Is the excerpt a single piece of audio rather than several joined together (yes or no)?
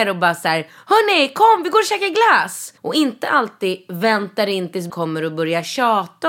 no